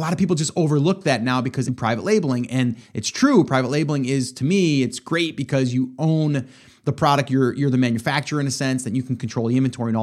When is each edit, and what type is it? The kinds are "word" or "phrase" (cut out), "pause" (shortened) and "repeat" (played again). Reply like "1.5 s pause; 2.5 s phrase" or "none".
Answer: 1.7 s phrase